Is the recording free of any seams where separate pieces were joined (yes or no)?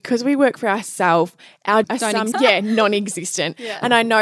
no